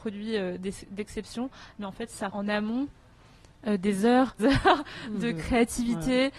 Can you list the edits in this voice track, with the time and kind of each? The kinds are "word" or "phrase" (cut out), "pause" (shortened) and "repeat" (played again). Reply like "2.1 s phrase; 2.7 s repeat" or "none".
2.3 s word; 4.4 s word